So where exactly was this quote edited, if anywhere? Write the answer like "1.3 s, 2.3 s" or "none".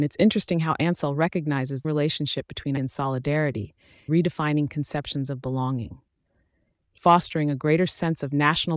1.8 s, 2.8 s, 4.1 s, 7.0 s